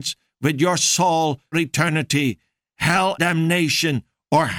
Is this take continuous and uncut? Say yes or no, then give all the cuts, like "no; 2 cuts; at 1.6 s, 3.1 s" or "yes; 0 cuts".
no; 2 cuts; at 1.5 s, 3.2 s